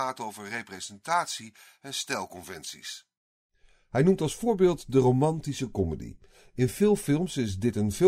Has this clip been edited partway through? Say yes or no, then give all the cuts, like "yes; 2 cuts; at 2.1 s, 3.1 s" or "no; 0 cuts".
no; 0 cuts